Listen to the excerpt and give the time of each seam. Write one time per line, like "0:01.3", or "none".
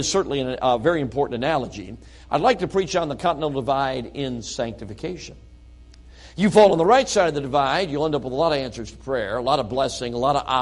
none